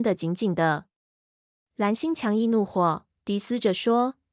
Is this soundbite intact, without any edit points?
yes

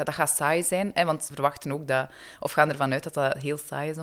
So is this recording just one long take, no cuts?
no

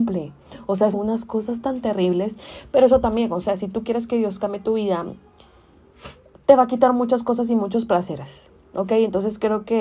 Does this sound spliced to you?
yes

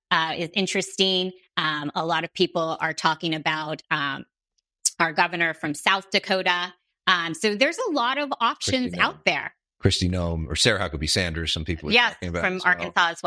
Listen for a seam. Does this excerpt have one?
no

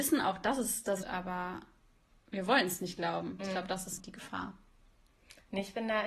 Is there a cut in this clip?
yes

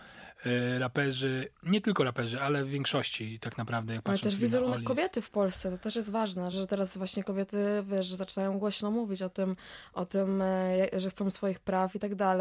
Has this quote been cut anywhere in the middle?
yes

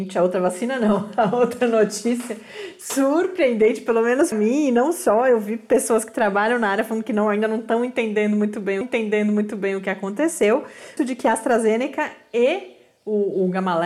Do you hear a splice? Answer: yes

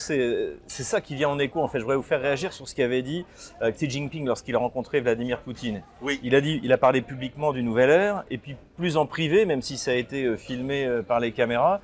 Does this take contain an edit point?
no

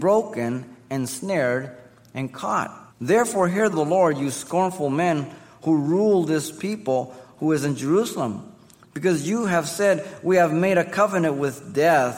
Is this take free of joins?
no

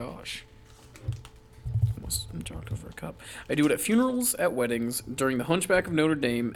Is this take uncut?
yes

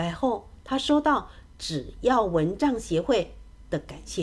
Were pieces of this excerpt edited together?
no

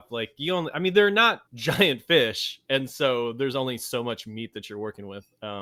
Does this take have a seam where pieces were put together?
yes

